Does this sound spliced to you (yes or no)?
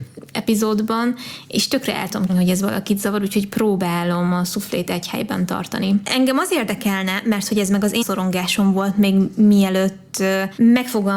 yes